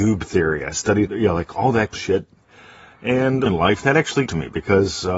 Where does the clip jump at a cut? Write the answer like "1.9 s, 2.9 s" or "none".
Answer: 1.1 s, 1.9 s, 3.5 s, 4.3 s